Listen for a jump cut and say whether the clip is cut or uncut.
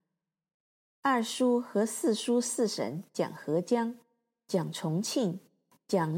uncut